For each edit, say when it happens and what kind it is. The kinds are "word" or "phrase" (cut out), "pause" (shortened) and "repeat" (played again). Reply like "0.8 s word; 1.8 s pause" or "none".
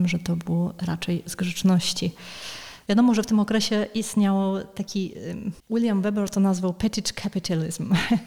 5.6 s pause